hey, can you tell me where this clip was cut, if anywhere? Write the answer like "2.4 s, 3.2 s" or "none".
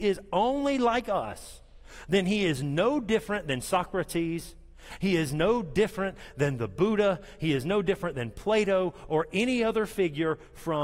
none

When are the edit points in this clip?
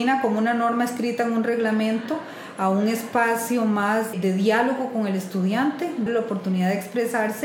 4.1 s, 6.1 s

